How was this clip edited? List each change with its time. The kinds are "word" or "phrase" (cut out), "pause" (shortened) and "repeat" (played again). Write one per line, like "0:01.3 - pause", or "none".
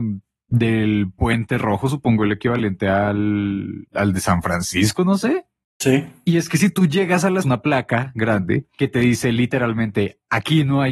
0:07.4 - phrase